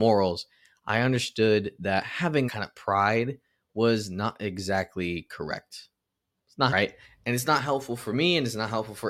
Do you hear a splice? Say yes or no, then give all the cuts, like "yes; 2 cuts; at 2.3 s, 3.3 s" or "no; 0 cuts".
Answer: yes; 3 cuts; at 2.5 s, 6.7 s, 7.0 s